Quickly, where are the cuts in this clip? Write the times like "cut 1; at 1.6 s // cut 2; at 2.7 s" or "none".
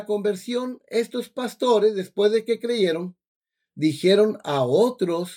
none